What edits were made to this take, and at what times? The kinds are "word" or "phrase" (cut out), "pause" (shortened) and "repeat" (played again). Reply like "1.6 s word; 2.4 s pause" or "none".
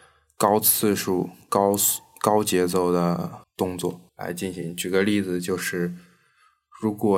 3.4 s pause; 4.1 s pause